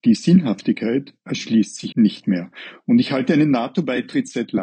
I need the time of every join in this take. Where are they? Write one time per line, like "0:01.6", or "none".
0:01.9